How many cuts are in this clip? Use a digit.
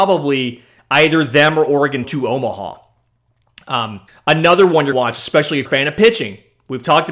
4